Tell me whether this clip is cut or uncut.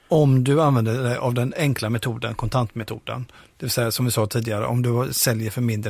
uncut